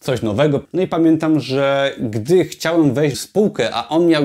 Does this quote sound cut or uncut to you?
cut